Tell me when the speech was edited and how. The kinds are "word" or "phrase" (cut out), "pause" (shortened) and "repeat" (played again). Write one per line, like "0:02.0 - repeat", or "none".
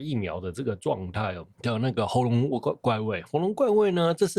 0:01.5 - pause